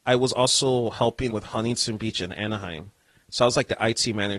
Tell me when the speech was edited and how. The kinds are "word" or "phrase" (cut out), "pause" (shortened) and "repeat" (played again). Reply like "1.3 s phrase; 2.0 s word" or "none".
1.3 s word